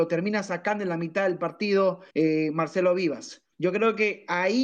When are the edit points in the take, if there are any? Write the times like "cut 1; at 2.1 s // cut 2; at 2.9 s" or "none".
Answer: cut 1; at 2.1 s // cut 2; at 3.5 s